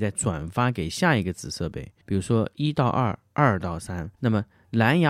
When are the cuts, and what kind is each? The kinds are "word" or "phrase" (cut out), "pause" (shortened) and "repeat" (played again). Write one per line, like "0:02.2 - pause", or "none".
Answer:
0:02.0 - pause
0:04.1 - pause

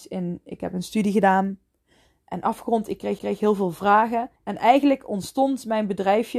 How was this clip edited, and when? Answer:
0:03.2 - repeat
0:04.4 - pause

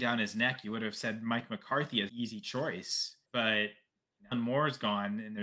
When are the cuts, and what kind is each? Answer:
0:02.1 - word
0:03.3 - pause
0:04.3 - phrase

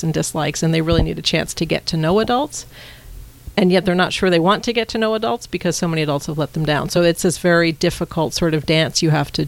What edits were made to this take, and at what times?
none

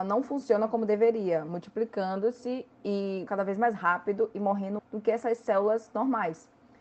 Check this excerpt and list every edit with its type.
0:03.3 - word
0:04.8 - word

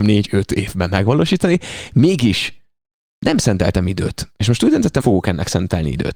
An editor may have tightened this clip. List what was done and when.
0:05.0 - word

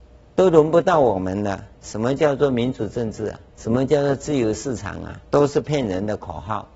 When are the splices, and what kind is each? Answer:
0:01.7 - pause
0:03.5 - pause
0:05.2 - pause

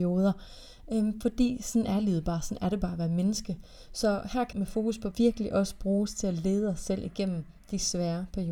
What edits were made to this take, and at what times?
0:04.5 - word
0:05.1 - phrase
0:07.6 - pause

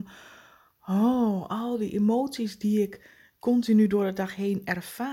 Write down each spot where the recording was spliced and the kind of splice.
none

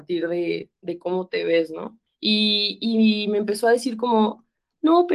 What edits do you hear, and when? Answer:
none

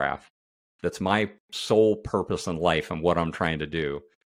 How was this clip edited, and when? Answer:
none

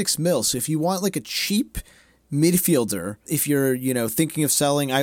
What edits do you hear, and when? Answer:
0:03.2 - word

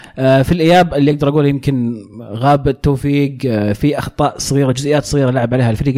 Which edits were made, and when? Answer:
none

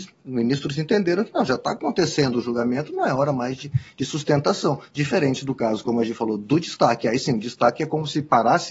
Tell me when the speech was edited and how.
none

